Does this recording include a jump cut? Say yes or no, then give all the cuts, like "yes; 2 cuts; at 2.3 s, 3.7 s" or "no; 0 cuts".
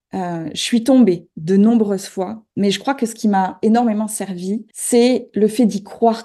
yes; 1 cut; at 4.7 s